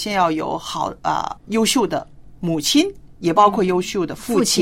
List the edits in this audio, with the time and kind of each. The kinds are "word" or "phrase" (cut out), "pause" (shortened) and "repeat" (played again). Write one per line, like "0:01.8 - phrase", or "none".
0:01.4 - pause
0:03.1 - pause